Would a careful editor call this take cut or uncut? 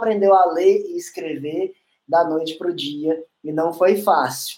uncut